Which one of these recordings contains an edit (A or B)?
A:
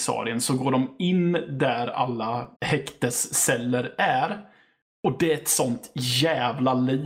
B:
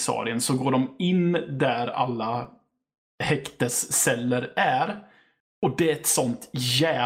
A